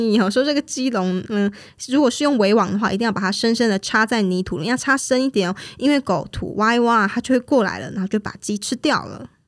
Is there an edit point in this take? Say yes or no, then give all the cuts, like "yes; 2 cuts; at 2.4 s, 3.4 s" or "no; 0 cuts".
no; 0 cuts